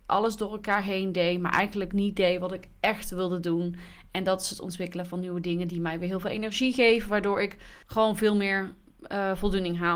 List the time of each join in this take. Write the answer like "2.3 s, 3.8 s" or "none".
7.8 s